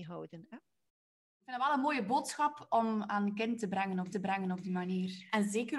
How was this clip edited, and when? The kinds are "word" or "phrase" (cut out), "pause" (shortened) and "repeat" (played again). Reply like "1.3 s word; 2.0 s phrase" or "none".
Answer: 4.1 s repeat